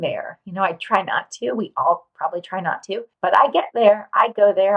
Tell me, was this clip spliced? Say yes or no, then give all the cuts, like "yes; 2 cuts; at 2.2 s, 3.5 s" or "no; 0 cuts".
yes; 1 cut; at 3.1 s